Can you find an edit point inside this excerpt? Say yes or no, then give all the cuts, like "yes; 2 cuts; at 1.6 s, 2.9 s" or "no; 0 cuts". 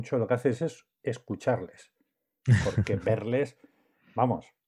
no; 0 cuts